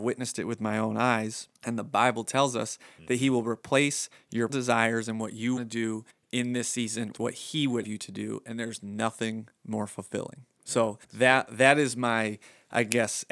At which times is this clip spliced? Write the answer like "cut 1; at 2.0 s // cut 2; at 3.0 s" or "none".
cut 1; at 1.6 s // cut 2; at 4.5 s // cut 3; at 5.6 s // cut 4; at 6.1 s // cut 5; at 7.1 s // cut 6; at 7.8 s // cut 7; at 11.0 s